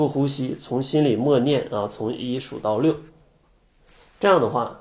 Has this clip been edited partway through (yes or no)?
no